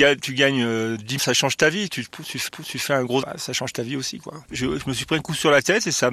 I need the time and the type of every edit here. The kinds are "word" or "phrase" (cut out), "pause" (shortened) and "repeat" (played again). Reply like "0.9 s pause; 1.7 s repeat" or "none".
1.2 s word; 2.5 s repeat; 3.2 s word; 4.4 s pause